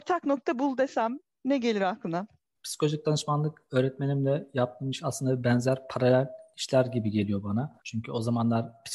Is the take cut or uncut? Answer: uncut